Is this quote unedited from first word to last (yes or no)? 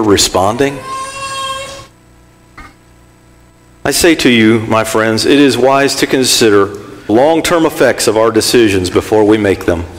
no